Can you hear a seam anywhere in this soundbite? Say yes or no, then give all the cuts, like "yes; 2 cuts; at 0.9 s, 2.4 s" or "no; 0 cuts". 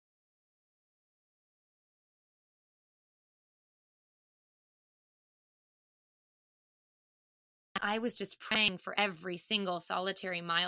no; 0 cuts